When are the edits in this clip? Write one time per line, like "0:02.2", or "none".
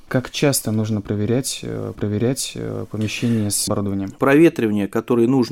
0:02.0
0:03.7